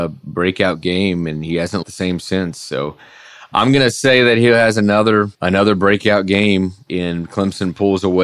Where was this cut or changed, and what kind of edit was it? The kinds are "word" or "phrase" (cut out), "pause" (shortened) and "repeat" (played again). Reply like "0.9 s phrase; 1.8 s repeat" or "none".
1.8 s word; 5.3 s pause; 6.9 s word